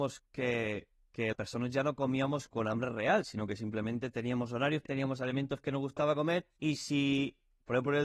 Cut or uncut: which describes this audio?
cut